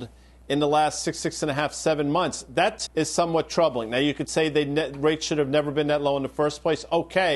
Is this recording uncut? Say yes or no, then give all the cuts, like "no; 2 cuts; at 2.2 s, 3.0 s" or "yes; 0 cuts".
no; 2 cuts; at 1.2 s, 2.9 s